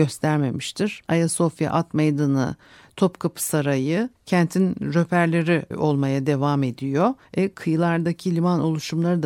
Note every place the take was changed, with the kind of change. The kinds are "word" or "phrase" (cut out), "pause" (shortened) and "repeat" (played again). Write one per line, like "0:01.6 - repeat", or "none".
0:01.1 - pause
0:04.2 - pause
0:05.7 - word
0:07.2 - pause